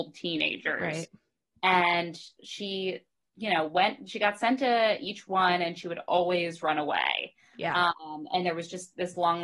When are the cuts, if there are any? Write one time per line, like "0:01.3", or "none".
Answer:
none